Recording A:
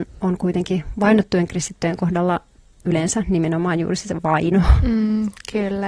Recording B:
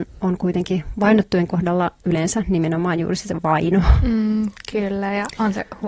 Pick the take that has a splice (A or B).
B